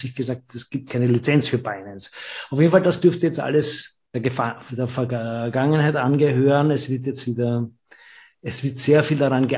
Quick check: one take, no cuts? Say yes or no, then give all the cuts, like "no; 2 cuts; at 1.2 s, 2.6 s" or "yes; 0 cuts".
yes; 0 cuts